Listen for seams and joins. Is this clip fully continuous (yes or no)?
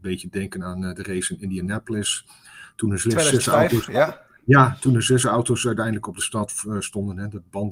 yes